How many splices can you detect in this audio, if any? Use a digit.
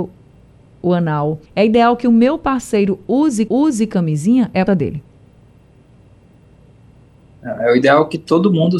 3